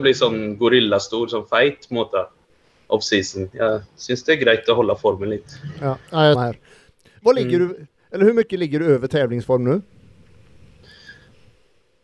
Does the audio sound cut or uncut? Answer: cut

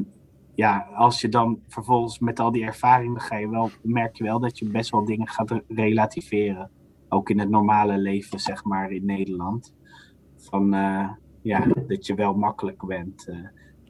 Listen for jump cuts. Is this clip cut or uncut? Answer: uncut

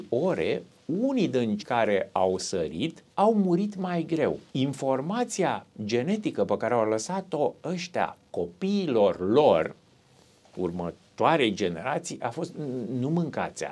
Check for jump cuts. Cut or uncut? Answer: cut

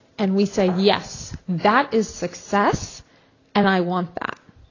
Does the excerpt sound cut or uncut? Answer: uncut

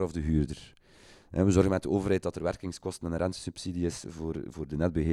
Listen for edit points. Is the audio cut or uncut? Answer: uncut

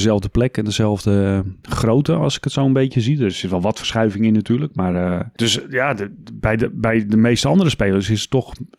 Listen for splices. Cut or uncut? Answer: uncut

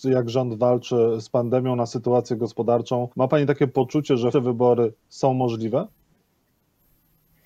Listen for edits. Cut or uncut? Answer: cut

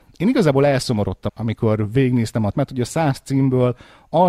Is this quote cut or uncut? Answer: cut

